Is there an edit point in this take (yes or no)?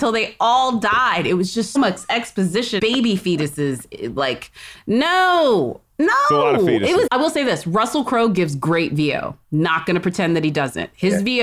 yes